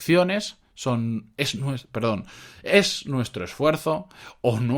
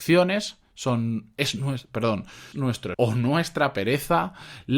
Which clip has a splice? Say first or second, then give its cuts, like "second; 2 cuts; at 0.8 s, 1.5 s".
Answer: second; 2 cuts; at 2.5 s, 2.9 s